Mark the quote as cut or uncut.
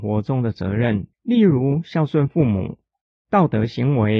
cut